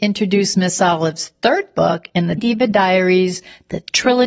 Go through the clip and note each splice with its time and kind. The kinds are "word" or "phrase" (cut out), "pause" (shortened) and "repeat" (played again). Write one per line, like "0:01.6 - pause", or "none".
0:02.4 - word